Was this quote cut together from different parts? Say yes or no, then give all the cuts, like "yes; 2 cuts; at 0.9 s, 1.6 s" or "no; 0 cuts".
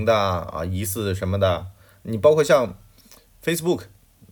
no; 0 cuts